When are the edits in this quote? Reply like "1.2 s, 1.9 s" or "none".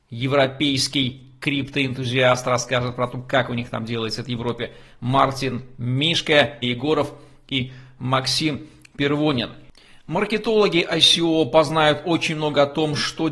6.6 s